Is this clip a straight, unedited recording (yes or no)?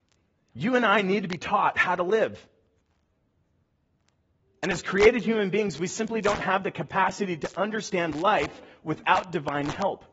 yes